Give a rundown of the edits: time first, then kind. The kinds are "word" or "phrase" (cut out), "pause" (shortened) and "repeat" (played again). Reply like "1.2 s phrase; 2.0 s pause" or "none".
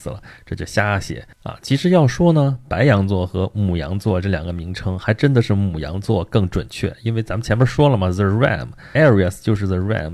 1.3 s pause; 9.0 s phrase